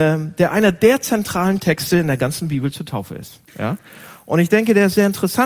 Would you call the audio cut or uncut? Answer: cut